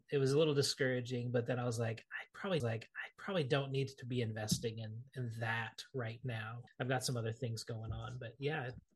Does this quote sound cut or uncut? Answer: cut